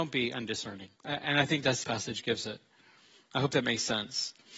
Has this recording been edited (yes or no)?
yes